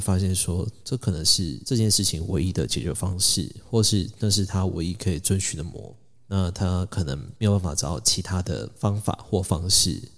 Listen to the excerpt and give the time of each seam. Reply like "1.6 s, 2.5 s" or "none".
none